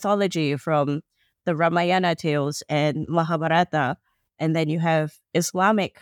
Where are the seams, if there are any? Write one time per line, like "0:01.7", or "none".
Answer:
none